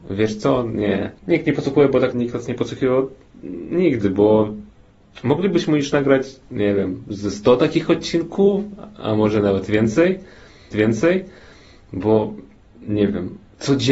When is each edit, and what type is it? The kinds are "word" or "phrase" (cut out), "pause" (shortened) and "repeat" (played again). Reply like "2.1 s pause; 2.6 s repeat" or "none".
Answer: 1.2 s pause; 2.1 s word; 10.7 s repeat